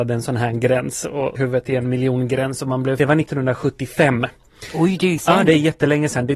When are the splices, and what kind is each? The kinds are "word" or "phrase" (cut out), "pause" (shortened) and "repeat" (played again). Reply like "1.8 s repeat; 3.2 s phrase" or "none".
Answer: 1.4 s word; 3.0 s phrase; 5.2 s word